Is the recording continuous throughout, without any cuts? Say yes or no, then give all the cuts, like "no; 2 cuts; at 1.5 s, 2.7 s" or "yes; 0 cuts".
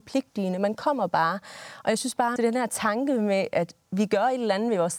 no; 1 cut; at 2.4 s